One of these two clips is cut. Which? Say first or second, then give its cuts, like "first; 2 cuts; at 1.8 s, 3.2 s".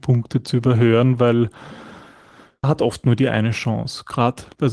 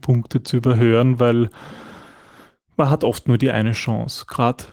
first; 1 cut; at 2.6 s